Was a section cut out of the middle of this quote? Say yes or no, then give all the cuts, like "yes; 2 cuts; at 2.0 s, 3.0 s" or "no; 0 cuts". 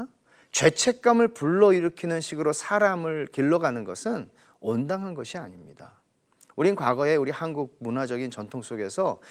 no; 0 cuts